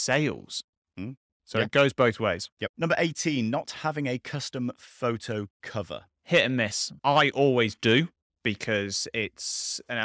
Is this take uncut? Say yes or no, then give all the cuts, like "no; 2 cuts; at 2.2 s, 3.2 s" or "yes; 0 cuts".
yes; 0 cuts